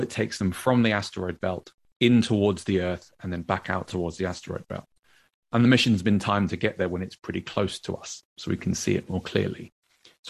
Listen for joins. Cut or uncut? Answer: uncut